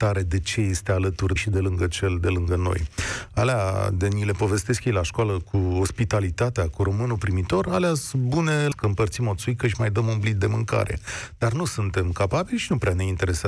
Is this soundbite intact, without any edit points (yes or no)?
no